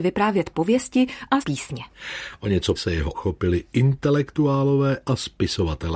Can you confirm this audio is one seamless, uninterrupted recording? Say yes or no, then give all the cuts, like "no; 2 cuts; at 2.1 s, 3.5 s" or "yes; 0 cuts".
no; 3 cuts; at 1.4 s, 2.8 s, 3.1 s